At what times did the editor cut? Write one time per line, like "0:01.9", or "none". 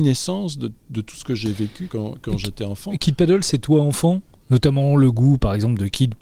0:01.9